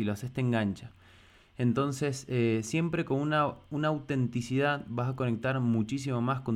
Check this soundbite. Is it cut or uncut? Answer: uncut